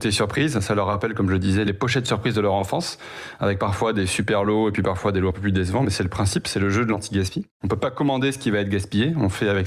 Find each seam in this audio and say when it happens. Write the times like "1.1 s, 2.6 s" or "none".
none